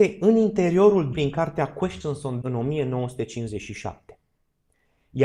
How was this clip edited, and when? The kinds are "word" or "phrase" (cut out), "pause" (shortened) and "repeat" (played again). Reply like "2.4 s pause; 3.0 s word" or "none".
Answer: 1.1 s word; 2.4 s word